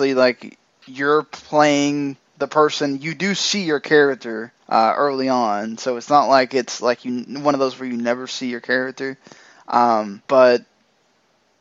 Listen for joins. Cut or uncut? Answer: cut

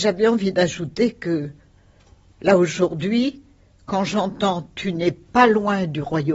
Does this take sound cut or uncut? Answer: uncut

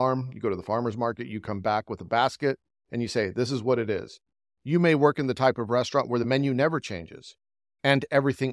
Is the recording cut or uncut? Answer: uncut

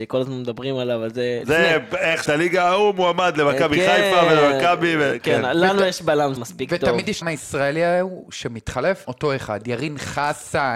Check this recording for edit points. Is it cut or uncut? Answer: cut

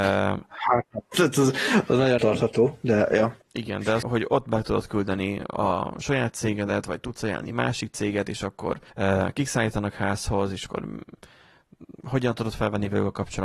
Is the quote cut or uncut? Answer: cut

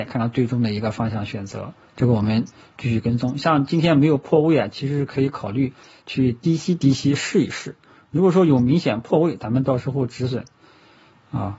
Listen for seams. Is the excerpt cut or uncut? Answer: uncut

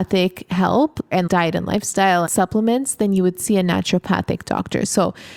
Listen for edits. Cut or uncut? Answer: cut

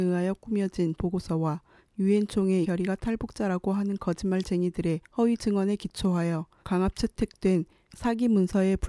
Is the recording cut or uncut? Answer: cut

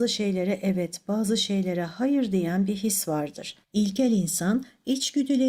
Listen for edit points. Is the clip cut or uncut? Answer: cut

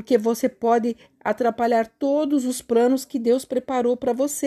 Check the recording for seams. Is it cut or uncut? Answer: uncut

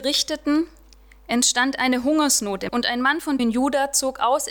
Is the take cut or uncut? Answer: cut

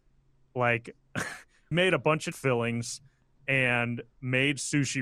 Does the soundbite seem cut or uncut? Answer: cut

